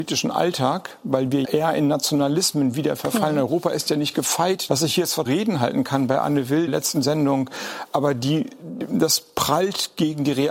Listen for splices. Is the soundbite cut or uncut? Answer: cut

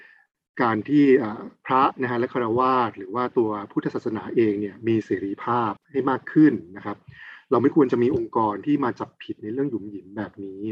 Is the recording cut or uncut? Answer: cut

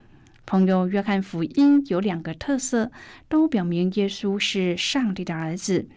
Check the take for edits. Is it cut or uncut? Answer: uncut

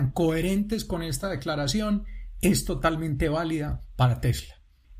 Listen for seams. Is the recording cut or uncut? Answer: uncut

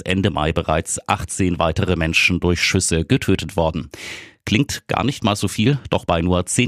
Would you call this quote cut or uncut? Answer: uncut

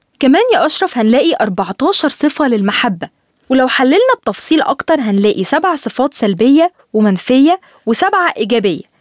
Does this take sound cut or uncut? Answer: uncut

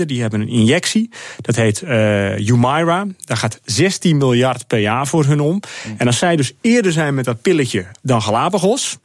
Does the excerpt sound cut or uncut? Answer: uncut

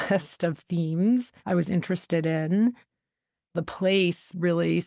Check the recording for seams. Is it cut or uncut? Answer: cut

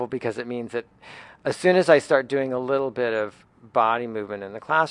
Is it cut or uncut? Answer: uncut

